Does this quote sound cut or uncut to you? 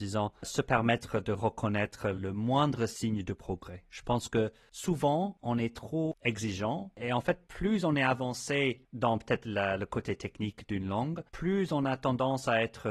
uncut